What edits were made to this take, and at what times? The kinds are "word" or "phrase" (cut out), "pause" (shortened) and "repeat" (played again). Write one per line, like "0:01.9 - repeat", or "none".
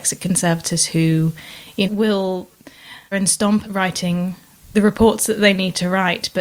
0:01.8 - word
0:03.1 - word
0:03.6 - word
0:04.7 - word

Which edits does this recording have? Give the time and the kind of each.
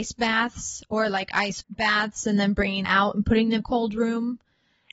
0:01.6 - word
0:02.8 - word
0:03.6 - word

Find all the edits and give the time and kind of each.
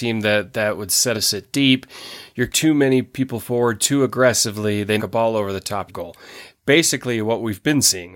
0:01.1 - phrase
0:02.5 - word
0:05.0 - word
0:05.9 - phrase

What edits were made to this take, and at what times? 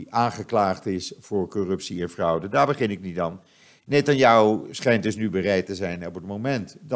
none

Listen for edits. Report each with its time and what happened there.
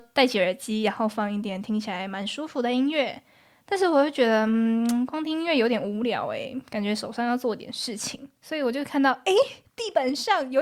0:09.6 - pause

